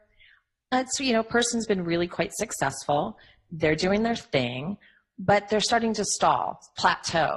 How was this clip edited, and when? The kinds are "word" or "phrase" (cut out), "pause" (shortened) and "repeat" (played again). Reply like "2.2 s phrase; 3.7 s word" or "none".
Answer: none